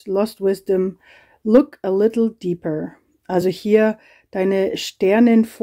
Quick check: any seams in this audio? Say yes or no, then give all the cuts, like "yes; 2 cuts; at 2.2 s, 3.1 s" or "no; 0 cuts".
no; 0 cuts